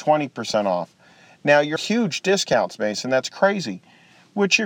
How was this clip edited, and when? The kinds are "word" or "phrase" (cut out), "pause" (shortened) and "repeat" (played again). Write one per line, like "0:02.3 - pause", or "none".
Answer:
0:01.8 - word